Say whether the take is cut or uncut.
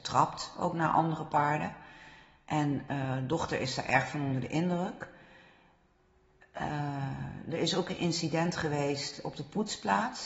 uncut